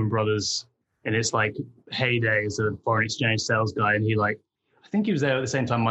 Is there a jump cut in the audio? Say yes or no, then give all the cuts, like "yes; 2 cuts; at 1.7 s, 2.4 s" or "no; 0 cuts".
no; 0 cuts